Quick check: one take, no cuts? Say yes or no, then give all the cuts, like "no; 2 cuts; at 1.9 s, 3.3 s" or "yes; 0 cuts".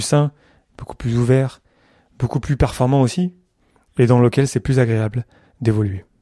yes; 0 cuts